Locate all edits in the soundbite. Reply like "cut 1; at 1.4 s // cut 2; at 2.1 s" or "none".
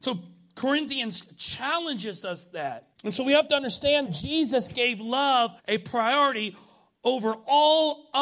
cut 1; at 2.9 s // cut 2; at 4.1 s // cut 3; at 5.6 s

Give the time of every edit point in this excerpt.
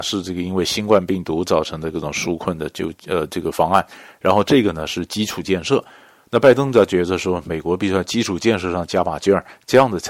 none

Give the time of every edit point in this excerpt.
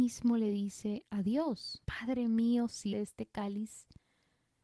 cut 1; at 1.8 s // cut 2; at 2.9 s

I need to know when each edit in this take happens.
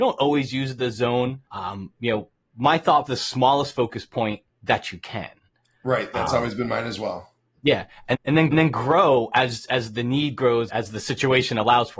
cut 1; at 1.5 s // cut 2; at 3.1 s // cut 3; at 4.5 s // cut 4; at 8.1 s // cut 5; at 8.5 s // cut 6; at 10.7 s

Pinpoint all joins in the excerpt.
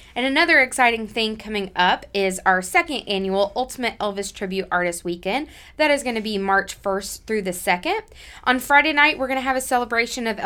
none

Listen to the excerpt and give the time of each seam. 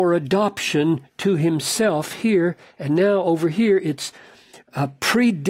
none

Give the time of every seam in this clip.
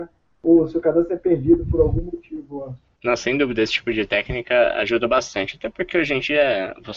cut 1; at 3.0 s

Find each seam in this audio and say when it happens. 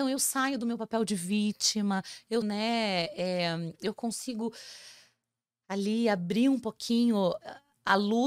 cut 1; at 2.4 s

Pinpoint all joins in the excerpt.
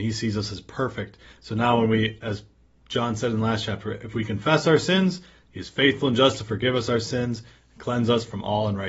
none

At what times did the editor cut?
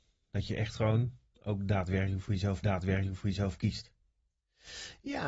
cut 1; at 2.6 s

